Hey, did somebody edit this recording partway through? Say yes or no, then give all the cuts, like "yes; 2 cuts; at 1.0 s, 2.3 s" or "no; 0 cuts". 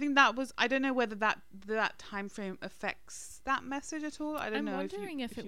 no; 0 cuts